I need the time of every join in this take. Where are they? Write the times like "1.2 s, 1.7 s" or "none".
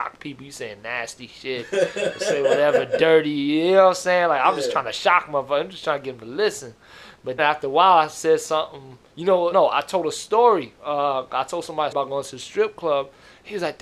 7.4 s, 9.1 s, 9.5 s, 11.9 s